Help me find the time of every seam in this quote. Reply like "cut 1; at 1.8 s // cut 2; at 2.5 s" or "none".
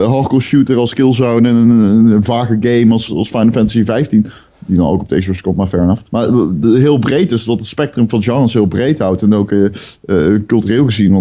cut 1; at 3.1 s // cut 2; at 6.1 s